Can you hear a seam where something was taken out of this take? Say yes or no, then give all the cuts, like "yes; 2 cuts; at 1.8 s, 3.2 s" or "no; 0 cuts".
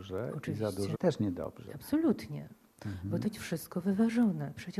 yes; 2 cuts; at 0.9 s, 3.2 s